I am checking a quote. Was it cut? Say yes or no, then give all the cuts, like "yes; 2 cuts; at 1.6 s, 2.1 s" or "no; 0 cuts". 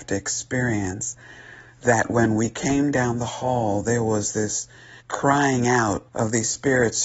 yes; 2 cuts; at 5.0 s, 6.1 s